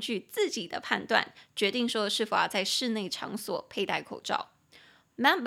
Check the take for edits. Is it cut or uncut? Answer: uncut